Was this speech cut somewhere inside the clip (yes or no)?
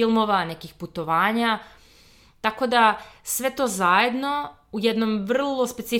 no